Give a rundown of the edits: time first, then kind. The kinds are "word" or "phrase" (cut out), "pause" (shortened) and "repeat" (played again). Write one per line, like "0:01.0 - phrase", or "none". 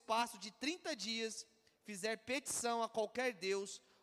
none